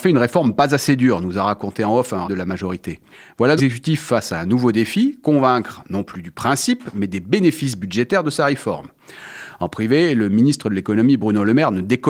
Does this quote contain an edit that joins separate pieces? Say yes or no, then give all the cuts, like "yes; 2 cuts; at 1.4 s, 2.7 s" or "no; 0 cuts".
yes; 2 cuts; at 2.2 s, 3.6 s